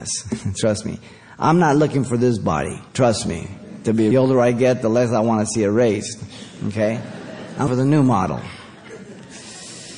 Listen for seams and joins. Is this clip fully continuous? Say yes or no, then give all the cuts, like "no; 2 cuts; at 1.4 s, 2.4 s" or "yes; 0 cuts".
no; 3 cuts; at 2.9 s, 4.1 s, 7.7 s